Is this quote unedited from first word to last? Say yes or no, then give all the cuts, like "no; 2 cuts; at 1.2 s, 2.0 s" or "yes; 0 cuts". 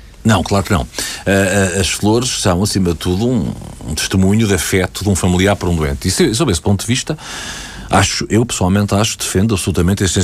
yes; 0 cuts